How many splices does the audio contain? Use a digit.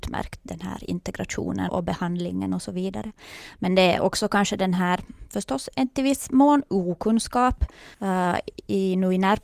2